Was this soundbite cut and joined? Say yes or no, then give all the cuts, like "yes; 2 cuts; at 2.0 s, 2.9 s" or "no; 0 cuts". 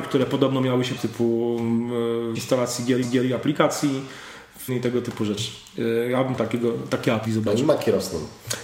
yes; 6 cuts; at 1.0 s, 2.3 s, 3.0 s, 4.7 s, 6.4 s, 7.2 s